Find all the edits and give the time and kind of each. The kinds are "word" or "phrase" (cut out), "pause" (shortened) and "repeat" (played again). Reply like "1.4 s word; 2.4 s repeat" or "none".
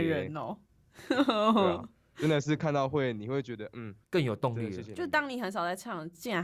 4.0 s pause